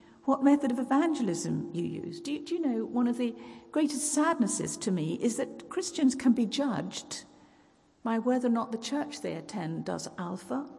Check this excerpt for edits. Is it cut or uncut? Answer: uncut